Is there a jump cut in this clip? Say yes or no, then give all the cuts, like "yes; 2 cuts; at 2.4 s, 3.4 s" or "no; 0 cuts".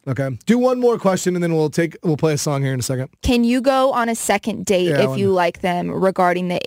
yes; 1 cut; at 3.2 s